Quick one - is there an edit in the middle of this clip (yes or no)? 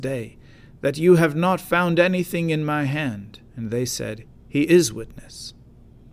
yes